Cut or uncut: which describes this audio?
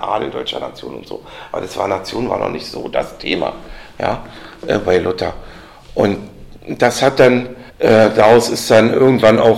cut